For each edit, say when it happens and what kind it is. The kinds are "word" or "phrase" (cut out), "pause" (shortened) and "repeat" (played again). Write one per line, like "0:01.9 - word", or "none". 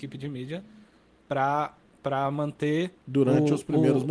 0:03.0 - pause